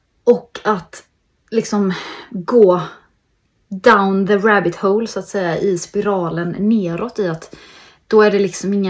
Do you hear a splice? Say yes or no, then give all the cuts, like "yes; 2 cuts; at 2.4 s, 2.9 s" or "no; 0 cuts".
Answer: no; 0 cuts